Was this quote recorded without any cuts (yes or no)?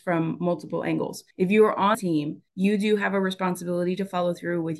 no